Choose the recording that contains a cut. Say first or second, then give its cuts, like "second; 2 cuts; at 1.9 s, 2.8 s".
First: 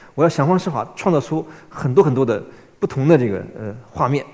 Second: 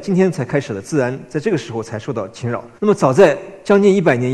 second; 1 cut; at 2.8 s